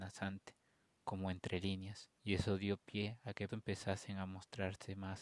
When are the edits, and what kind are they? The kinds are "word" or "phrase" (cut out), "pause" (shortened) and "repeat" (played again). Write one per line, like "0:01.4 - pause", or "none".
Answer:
0:02.1 - pause
0:03.5 - word